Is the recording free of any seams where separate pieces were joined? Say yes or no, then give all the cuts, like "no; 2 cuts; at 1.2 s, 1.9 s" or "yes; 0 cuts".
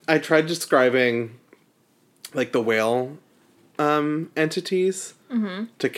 yes; 0 cuts